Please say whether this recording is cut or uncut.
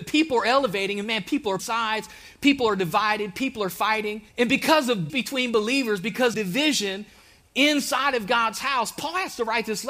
cut